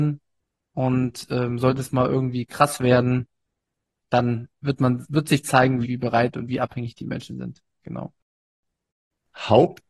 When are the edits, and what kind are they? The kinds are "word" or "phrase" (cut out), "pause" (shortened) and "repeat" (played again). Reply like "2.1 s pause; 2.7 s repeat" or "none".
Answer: 5.8 s word